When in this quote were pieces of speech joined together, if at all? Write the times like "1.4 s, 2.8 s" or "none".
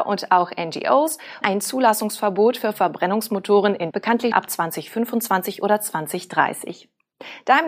1.4 s, 3.9 s, 4.3 s

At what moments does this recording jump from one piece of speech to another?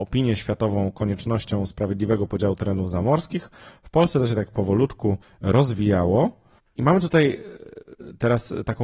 5.2 s

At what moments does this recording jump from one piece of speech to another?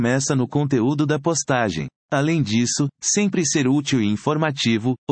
2.0 s

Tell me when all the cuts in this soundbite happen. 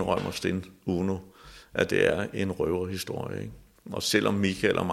none

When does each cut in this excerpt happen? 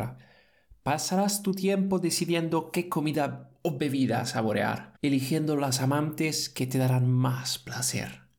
5.0 s

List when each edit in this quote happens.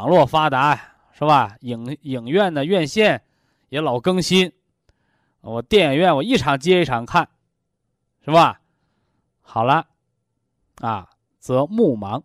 none

